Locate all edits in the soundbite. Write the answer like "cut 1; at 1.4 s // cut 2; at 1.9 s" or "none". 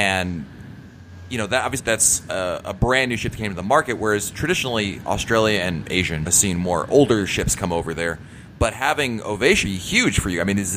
cut 1; at 1.8 s // cut 2; at 6.3 s // cut 3; at 9.6 s